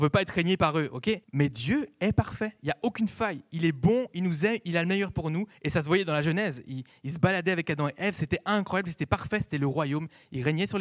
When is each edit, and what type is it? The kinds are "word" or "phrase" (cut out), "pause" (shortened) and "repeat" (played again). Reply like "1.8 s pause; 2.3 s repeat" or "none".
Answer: 1.2 s pause; 5.5 s pause